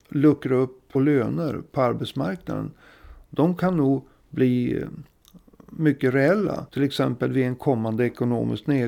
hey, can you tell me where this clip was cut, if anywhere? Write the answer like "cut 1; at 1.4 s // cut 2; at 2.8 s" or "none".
cut 1; at 0.9 s